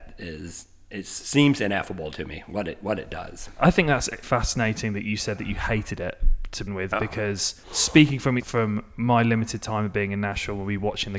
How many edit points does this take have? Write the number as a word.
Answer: four